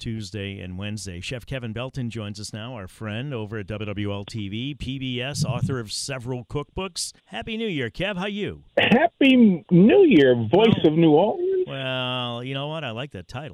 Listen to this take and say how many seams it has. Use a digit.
2